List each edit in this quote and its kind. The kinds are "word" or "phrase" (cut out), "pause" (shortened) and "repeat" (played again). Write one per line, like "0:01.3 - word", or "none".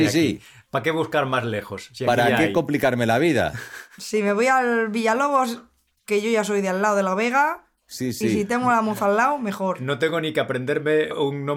none